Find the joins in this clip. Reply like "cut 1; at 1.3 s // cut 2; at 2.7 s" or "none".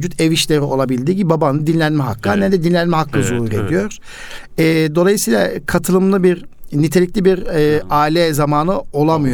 none